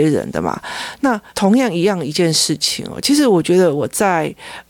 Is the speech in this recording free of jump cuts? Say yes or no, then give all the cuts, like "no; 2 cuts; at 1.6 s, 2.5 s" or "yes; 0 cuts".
no; 1 cut; at 1.3 s